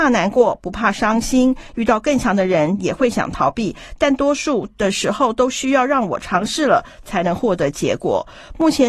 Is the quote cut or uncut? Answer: uncut